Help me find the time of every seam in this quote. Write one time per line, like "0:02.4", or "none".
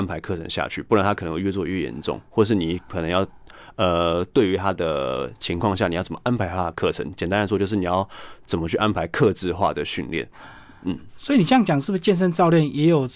none